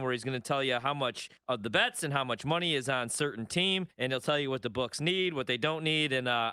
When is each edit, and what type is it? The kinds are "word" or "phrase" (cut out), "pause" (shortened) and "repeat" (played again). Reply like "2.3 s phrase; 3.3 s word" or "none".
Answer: 1.4 s pause; 3.9 s pause